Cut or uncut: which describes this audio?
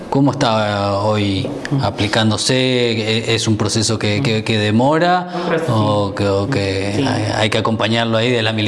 uncut